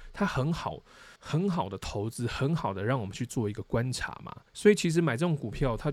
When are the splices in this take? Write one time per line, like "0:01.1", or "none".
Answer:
0:01.2
0:04.5